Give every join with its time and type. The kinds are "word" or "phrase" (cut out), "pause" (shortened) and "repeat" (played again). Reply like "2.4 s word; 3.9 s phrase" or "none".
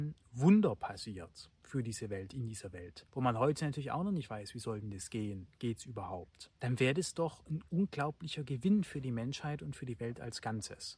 1.5 s pause; 3.1 s pause; 6.6 s pause